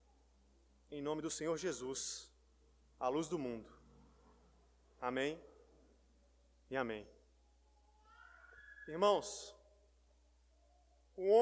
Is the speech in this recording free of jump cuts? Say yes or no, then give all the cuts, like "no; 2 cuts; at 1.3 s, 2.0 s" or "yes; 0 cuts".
yes; 0 cuts